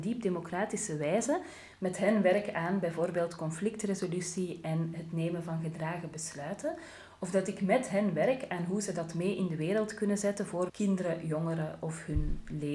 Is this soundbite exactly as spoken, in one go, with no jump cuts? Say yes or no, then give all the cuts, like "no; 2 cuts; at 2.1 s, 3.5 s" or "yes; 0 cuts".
no; 1 cut; at 10.7 s